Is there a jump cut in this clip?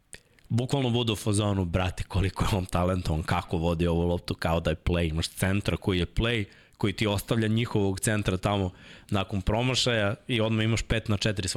no; 0 cuts

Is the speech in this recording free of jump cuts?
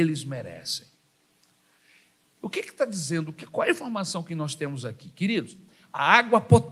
yes; 0 cuts

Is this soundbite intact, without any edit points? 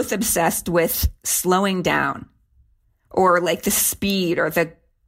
yes; 0 cuts

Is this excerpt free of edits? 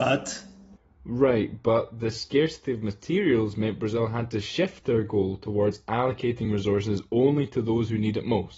yes; 0 cuts

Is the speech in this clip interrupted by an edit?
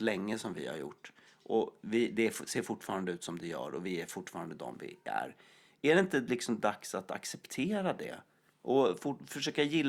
no; 0 cuts

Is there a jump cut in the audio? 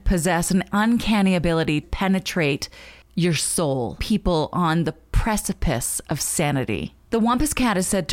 yes; 2 cuts; at 1.8 s, 4.0 s

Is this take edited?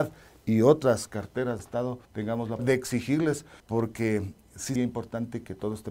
yes; 5 cuts; at 1.6 s, 2.0 s, 2.6 s, 3.6 s, 4.8 s

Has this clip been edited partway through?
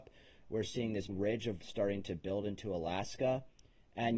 yes; 2 cuts; at 1.1 s, 1.6 s

